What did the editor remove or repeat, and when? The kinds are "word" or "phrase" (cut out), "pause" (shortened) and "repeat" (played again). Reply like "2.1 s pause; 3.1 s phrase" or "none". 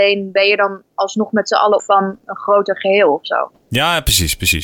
1.8 s word